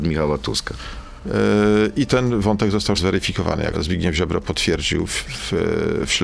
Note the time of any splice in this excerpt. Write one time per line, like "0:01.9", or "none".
0:02.1
0:02.9
0:03.7